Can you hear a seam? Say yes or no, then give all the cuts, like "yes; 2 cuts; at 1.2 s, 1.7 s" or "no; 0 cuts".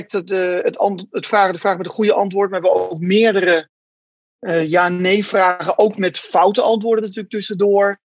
no; 0 cuts